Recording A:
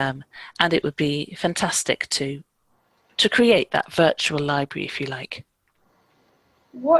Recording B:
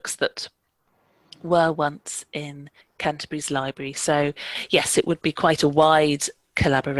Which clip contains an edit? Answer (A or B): B